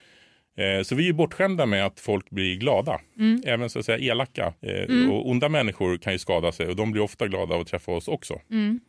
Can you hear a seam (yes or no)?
yes